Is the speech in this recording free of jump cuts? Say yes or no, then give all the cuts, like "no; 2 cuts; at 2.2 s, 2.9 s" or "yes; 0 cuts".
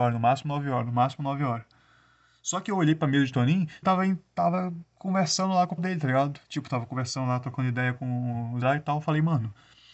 no; 4 cuts; at 3.8 s, 5.8 s, 6.4 s, 8.6 s